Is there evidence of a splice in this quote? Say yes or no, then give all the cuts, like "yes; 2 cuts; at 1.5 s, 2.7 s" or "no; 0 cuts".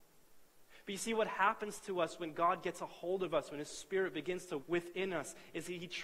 yes; 1 cut; at 4.6 s